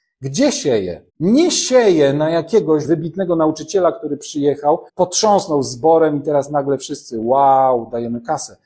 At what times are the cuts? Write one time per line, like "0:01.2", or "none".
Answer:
0:01.1
0:02.8
0:04.9